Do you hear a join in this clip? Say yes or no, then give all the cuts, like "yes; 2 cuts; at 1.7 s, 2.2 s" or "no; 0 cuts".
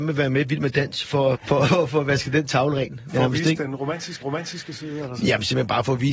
yes; 3 cuts; at 1.3 s, 1.7 s, 4.2 s